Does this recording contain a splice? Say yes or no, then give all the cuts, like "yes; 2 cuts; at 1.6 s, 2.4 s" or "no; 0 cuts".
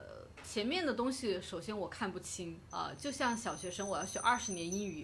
yes; 1 cut; at 2.7 s